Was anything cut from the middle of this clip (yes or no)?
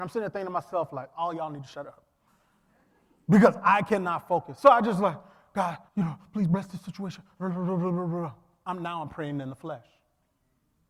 yes